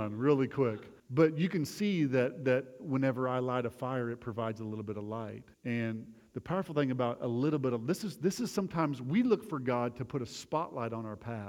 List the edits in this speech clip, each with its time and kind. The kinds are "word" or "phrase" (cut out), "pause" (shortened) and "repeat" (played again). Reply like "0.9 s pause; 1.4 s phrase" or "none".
1.0 s pause; 5.5 s pause